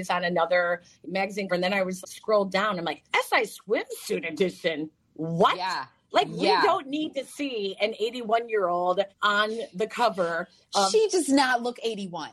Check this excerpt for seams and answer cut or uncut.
cut